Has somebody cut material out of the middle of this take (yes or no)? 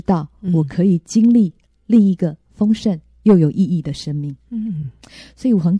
no